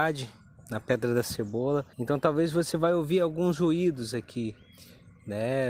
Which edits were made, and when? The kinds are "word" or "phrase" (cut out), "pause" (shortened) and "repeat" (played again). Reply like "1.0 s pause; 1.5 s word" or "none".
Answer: 1.9 s pause